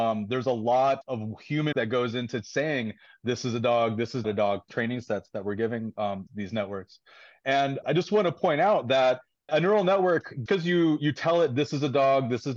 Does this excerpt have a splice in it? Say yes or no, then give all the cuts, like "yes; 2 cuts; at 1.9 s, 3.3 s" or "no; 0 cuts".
yes; 8 cuts; at 1.0 s, 1.7 s, 4.2 s, 4.7 s, 6.3 s, 7.8 s, 9.5 s, 10.5 s